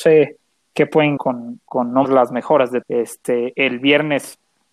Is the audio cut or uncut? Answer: cut